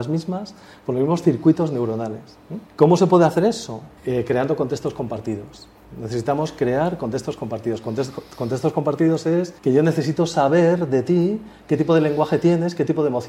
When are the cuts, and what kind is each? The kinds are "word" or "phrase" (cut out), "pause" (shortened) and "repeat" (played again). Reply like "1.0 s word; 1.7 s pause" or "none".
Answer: 2.7 s pause; 4.0 s pause; 9.6 s pause